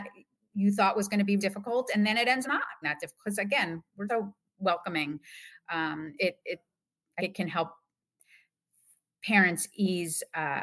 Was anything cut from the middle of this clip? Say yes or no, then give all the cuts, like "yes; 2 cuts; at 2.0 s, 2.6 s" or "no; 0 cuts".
yes; 6 cuts; at 1.4 s, 2.4 s, 2.8 s, 4.1 s, 6.2 s, 7.2 s